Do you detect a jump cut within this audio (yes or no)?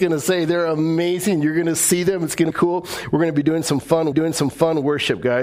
yes